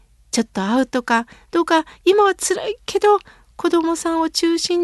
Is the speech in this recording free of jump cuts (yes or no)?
yes